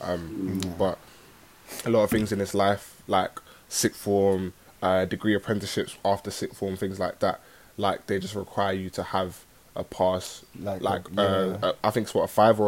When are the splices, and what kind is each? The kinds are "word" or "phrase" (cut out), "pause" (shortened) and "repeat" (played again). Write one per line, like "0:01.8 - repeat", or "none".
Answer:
none